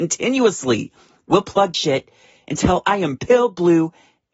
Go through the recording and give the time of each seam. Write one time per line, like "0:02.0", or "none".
0:01.7
0:03.2